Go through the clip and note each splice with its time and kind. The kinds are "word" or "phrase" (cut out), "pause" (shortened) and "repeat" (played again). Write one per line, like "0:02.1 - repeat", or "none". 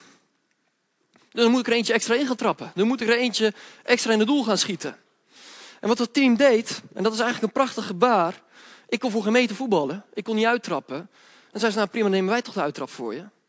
none